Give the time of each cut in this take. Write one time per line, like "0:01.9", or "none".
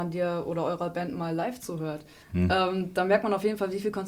none

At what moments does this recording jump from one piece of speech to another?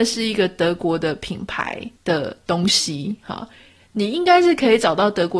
0:02.0

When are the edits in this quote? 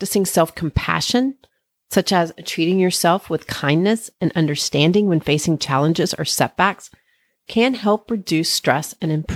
none

